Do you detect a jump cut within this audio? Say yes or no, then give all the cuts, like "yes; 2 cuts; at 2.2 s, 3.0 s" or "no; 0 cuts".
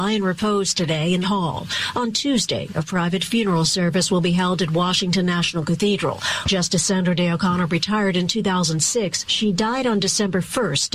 yes; 1 cut; at 1.2 s